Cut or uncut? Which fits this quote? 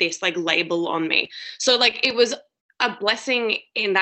uncut